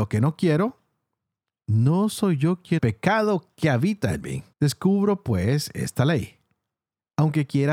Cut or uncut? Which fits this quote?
cut